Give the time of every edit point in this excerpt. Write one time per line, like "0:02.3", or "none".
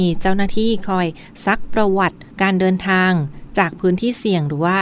0:02.3